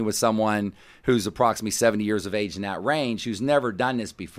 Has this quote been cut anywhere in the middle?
no; 0 cuts

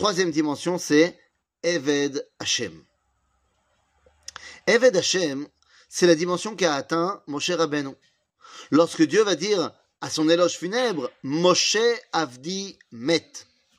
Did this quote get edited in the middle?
no; 0 cuts

